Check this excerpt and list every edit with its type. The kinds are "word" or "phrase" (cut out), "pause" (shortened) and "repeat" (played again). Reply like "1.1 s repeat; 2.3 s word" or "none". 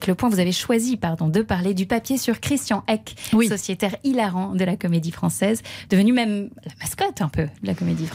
none